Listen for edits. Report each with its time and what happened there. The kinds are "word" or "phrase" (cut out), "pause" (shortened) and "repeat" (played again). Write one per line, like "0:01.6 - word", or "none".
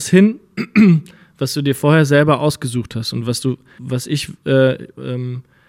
0:03.8 - word